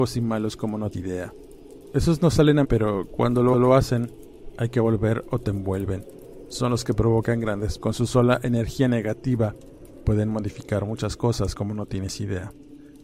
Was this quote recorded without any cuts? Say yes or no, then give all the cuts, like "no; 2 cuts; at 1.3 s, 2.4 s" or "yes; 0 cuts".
no; 4 cuts; at 0.9 s, 2.6 s, 3.5 s, 7.8 s